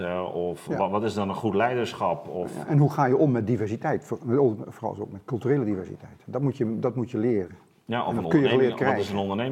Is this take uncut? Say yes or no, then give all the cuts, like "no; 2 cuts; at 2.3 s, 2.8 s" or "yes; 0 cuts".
yes; 0 cuts